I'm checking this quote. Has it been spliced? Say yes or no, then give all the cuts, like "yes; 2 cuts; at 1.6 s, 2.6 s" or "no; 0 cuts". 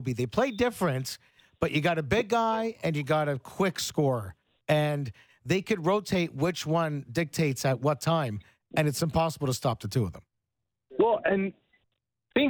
no; 0 cuts